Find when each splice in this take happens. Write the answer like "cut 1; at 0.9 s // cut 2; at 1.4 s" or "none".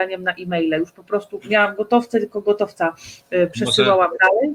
none